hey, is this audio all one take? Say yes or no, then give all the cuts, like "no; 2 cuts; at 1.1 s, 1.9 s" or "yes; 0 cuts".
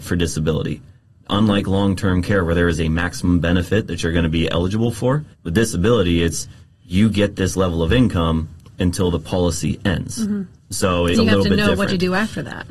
no; 3 cuts; at 5.3 s, 10.6 s, 11.1 s